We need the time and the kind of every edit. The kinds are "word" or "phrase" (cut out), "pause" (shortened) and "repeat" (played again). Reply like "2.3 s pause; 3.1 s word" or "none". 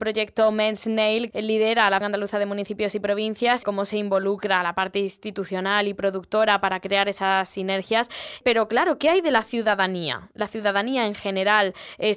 1.3 s word; 2.0 s word; 3.6 s word